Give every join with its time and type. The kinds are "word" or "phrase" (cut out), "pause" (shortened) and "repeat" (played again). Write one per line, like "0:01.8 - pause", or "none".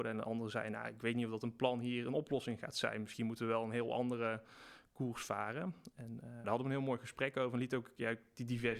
0:06.4 - word